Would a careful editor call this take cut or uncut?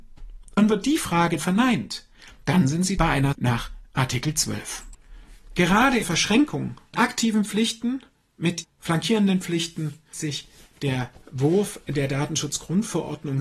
cut